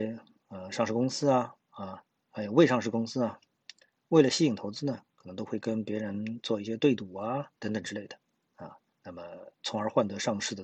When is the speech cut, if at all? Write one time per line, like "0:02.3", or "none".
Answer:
0:01.6
0:07.6
0:08.9
0:09.5